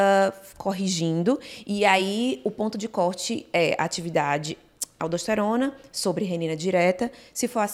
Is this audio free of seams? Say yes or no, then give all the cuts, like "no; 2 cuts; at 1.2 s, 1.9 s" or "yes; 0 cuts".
yes; 0 cuts